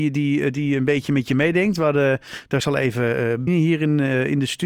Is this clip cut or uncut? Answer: cut